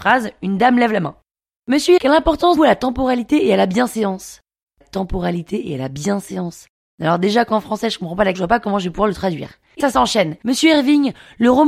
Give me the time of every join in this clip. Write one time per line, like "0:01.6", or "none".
0:02.0
0:02.6
0:04.8
0:08.3
0:09.8